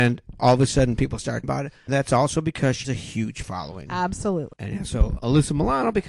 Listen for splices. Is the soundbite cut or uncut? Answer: cut